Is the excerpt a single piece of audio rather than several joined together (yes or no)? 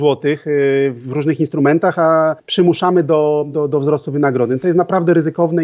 no